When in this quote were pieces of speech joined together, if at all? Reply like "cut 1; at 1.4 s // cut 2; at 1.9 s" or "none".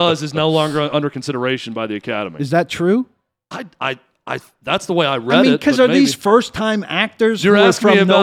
none